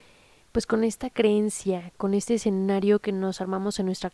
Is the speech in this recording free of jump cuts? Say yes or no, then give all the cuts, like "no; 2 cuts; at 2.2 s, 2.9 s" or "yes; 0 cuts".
yes; 0 cuts